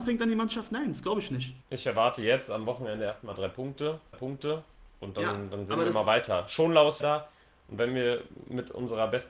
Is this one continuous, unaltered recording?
no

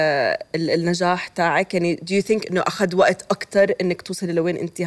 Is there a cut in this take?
no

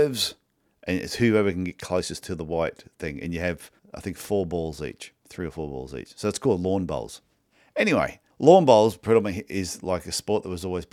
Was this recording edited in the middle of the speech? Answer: yes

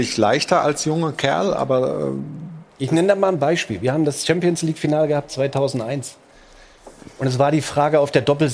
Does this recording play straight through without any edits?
yes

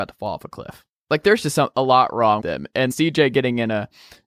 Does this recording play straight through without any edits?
no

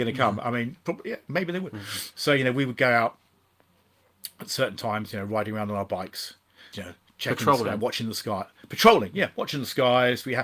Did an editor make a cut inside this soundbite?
yes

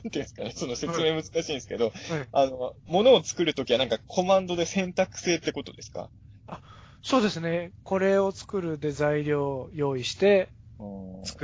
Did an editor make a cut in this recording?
no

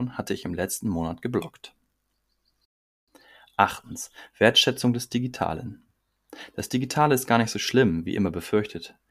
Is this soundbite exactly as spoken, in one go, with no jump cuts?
yes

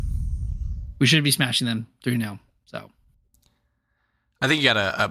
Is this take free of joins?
yes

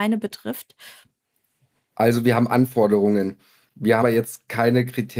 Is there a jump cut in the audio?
yes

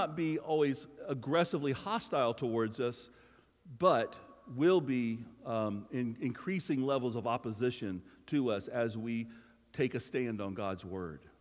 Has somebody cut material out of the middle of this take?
no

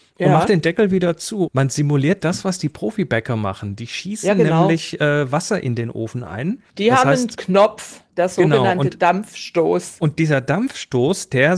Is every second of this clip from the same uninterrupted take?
no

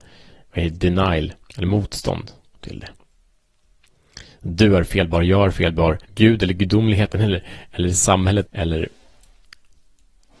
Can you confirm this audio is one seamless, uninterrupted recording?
no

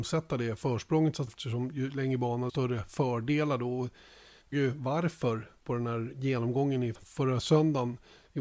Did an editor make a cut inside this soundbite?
yes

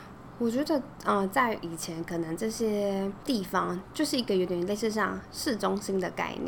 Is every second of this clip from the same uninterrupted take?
yes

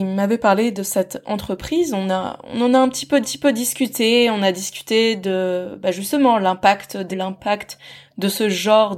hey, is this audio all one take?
no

